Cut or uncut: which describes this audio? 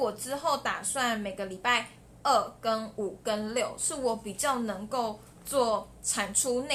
uncut